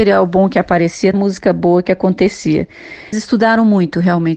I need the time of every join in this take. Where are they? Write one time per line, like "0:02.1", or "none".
0:01.1
0:03.1